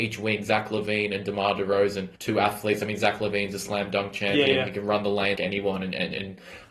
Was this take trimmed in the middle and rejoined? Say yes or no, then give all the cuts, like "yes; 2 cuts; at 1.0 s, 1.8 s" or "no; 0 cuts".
yes; 2 cuts; at 2.2 s, 5.4 s